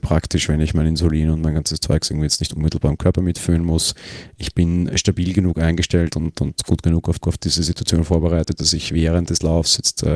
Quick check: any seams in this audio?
yes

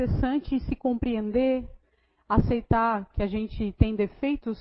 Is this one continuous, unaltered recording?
yes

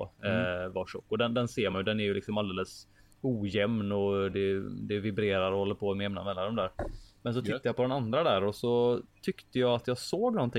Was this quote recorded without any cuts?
yes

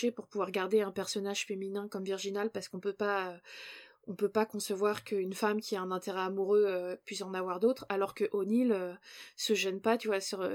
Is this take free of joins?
yes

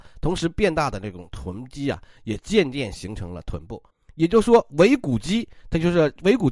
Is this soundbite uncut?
no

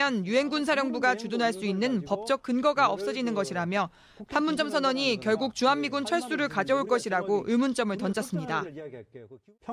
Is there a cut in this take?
no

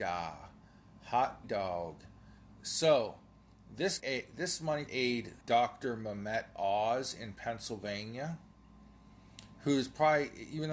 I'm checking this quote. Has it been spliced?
yes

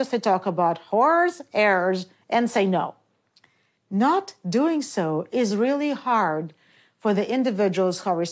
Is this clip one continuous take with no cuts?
yes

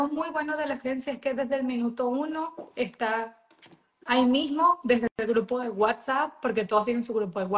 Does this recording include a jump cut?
no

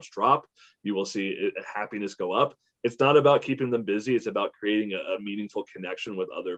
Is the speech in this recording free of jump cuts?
yes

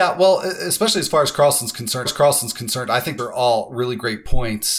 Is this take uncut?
no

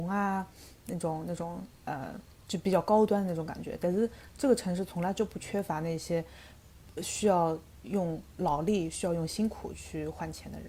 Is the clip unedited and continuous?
yes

